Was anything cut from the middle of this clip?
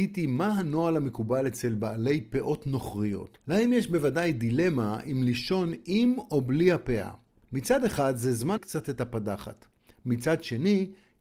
yes; 3 cuts; at 3.4 s, 7.4 s, 8.6 s

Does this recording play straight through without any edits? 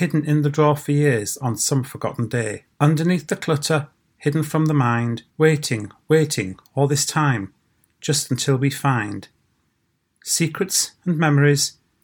no; 2 cuts; at 2.7 s, 5.3 s

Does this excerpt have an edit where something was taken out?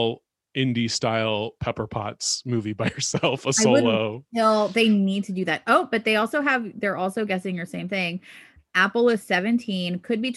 no; 0 cuts

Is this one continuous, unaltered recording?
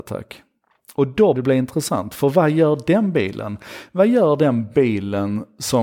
no; 1 cut; at 1.3 s

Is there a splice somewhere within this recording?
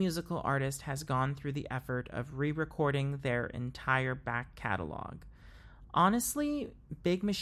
no; 0 cuts

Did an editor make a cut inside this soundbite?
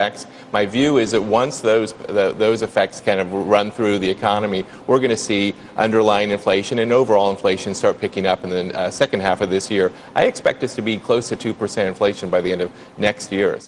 no; 0 cuts

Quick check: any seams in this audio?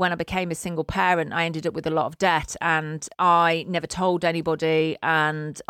no; 0 cuts

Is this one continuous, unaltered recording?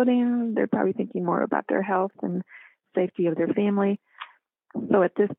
yes; 0 cuts

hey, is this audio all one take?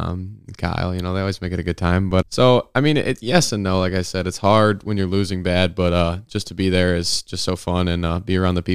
no; 1 cut; at 2.2 s

